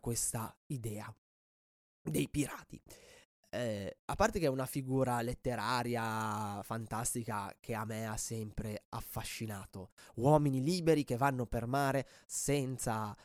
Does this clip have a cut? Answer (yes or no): no